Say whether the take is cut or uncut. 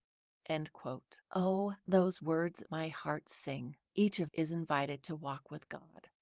cut